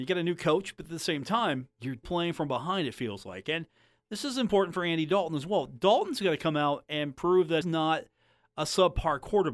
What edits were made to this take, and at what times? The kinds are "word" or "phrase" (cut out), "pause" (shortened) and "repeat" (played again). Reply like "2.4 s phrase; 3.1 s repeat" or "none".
2.0 s word; 7.6 s word